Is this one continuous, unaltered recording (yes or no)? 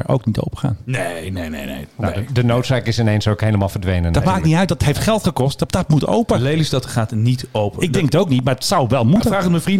yes